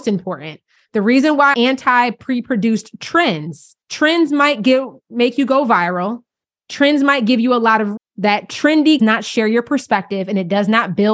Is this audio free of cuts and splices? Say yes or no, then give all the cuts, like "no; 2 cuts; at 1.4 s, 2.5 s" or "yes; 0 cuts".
no; 4 cuts; at 1.5 s, 3.8 s, 8.0 s, 9.0 s